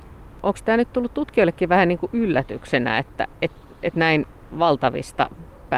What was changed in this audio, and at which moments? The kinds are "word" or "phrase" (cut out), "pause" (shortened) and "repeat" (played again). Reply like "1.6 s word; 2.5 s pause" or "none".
none